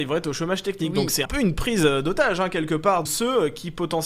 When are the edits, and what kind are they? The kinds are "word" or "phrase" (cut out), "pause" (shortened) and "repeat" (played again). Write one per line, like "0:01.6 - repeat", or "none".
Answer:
0:01.3 - word
0:03.1 - word